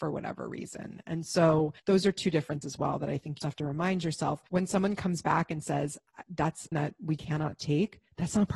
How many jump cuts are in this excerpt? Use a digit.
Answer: 6